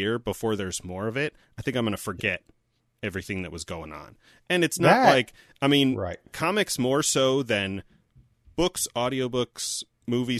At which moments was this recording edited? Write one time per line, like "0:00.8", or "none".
none